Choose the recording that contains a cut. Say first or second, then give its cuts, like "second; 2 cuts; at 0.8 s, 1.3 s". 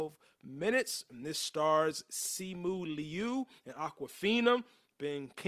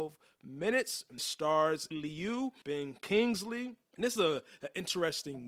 second; 4 cuts; at 1.2 s, 1.9 s, 2.6 s, 4.2 s